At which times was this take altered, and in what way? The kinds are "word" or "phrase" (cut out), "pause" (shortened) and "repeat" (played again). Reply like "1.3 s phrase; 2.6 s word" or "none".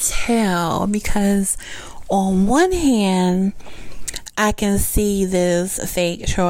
none